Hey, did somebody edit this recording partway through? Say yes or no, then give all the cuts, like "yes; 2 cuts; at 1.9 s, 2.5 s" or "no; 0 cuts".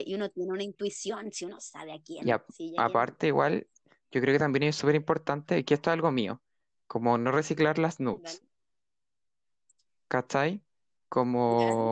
no; 0 cuts